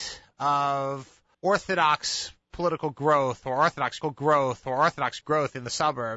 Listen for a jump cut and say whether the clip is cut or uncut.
cut